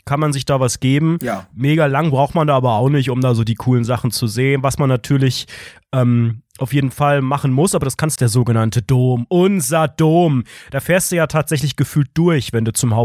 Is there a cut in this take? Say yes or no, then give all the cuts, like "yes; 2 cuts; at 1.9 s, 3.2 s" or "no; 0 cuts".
yes; 1 cut; at 8.2 s